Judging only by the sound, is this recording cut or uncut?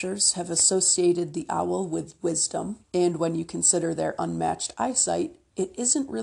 cut